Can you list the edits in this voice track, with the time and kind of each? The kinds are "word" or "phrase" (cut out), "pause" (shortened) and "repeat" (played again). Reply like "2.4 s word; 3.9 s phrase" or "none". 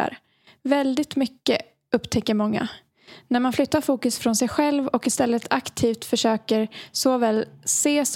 none

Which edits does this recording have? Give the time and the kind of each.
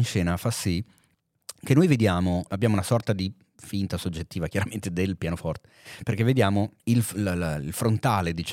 2.5 s word; 6.8 s pause

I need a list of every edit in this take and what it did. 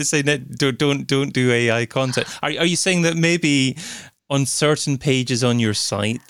none

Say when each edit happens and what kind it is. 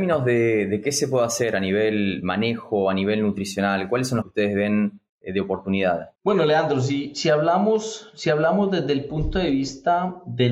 4.2 s phrase; 5.1 s pause; 6.1 s pause

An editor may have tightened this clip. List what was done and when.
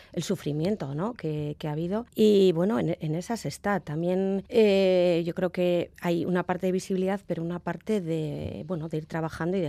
2.1 s pause; 4.5 s pause

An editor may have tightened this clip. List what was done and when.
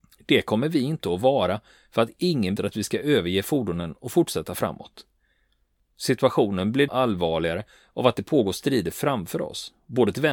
2.6 s word; 6.9 s word

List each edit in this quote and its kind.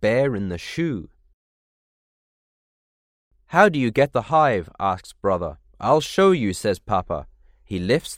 4.1 s phrase; 5.7 s pause

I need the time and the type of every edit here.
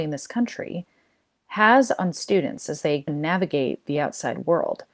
3.1 s word

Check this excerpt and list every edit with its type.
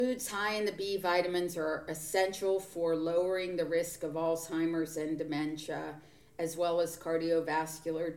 none

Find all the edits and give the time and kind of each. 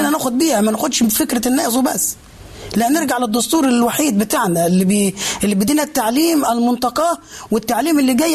none

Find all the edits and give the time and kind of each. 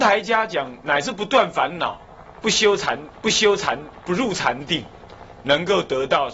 3.2 s repeat

